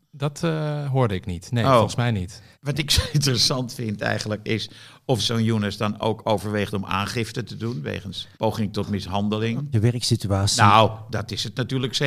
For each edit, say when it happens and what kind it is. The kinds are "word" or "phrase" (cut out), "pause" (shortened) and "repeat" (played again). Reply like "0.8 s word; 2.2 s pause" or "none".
2.5 s pause; 5.2 s word; 8.3 s pause; 9.7 s word